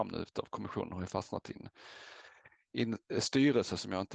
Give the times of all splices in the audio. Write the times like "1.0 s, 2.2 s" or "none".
none